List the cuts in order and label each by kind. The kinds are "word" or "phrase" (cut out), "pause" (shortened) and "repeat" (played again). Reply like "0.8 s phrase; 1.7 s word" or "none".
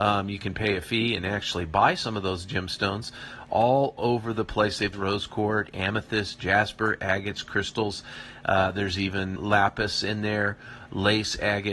4.9 s phrase; 9.4 s word